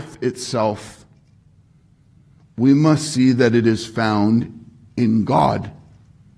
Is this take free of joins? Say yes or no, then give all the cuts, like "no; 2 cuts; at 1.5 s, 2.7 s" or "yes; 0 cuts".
yes; 0 cuts